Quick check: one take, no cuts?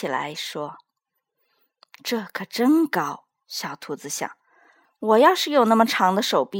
yes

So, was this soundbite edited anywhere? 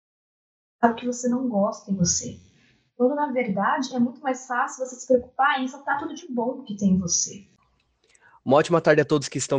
no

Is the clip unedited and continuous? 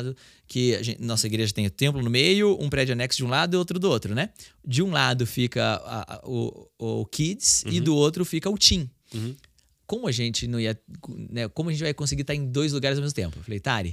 yes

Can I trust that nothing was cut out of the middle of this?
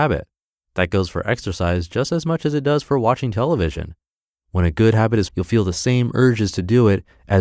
no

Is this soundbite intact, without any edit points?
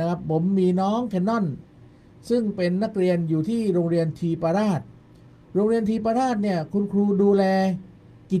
yes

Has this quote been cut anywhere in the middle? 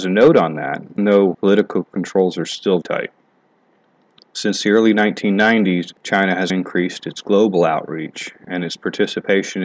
yes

